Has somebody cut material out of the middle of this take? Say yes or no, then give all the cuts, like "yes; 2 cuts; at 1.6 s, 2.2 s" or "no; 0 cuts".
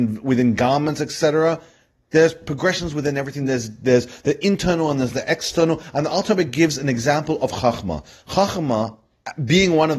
no; 0 cuts